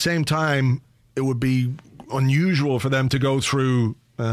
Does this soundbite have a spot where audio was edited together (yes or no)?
no